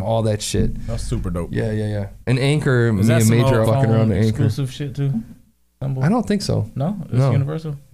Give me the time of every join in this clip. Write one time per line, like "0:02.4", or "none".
0:02.2
0:03.6

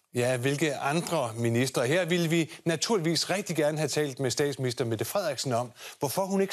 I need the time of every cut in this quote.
none

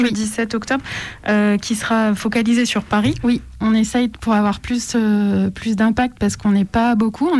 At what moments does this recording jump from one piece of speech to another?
none

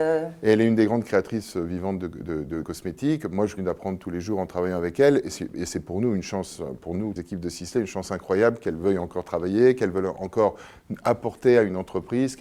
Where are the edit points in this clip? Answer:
0:02.6
0:03.6
0:07.2

